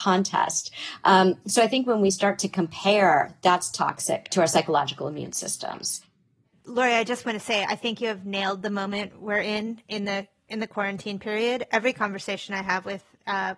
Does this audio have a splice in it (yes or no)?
no